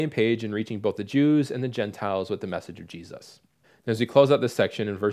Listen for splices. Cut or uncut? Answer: cut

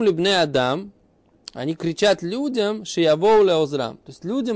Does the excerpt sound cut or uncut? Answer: uncut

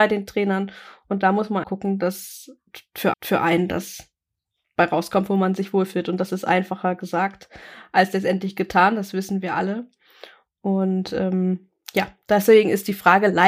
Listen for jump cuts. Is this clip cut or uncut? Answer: cut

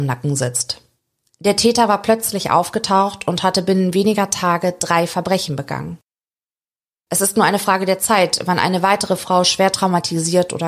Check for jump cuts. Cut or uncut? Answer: uncut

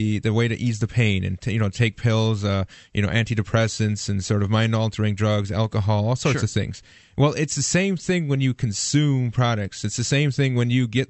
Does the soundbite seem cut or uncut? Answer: uncut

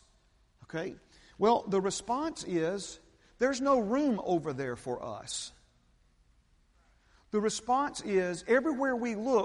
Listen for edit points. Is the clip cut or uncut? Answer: uncut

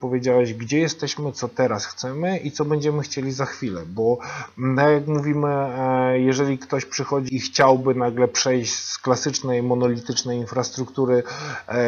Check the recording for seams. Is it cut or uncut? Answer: cut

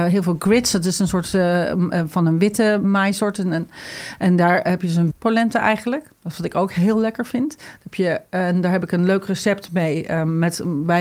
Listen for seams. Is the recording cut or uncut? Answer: cut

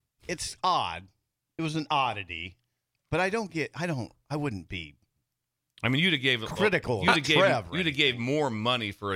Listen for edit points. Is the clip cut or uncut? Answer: uncut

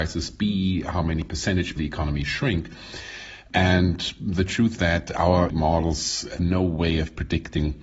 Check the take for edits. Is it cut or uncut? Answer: cut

